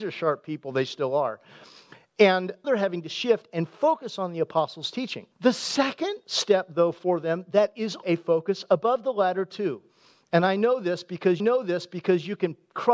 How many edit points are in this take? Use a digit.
4